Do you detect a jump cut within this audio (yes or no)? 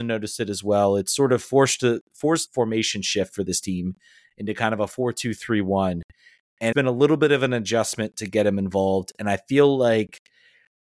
yes